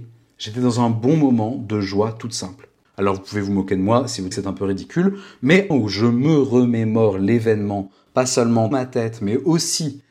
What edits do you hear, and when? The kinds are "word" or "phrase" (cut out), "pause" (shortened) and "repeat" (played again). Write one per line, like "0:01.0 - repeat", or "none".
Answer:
0:02.8 - pause
0:04.3 - word
0:05.7 - phrase
0:08.7 - word